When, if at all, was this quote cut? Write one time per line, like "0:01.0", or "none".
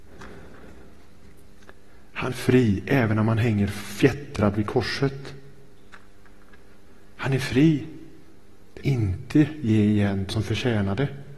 0:02.3
0:08.8
0:10.3